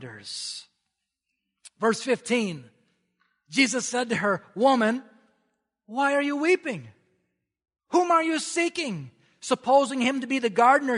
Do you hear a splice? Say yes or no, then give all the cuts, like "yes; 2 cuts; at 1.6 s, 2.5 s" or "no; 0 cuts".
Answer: no; 0 cuts